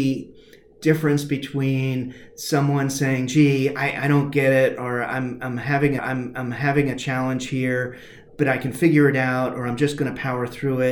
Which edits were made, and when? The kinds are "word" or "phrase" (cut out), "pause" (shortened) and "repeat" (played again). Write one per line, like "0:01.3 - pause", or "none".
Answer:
0:06.0 - repeat
0:08.3 - word